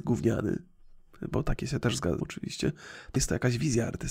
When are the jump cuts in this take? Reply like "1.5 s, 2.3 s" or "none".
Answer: 2.2 s, 3.2 s